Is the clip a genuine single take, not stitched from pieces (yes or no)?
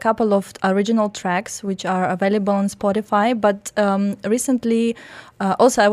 yes